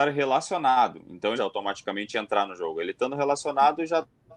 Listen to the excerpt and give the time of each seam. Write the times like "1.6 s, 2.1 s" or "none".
1.4 s